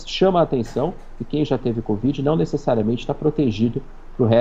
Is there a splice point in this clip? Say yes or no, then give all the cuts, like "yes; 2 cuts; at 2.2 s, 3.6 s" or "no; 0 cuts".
no; 0 cuts